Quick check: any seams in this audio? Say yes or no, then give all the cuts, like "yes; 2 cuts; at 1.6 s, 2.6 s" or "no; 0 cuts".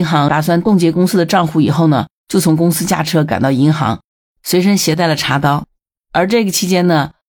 no; 0 cuts